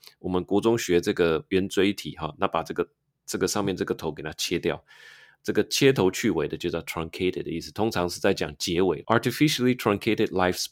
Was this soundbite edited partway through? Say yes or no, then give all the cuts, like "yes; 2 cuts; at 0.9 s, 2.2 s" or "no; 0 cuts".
no; 0 cuts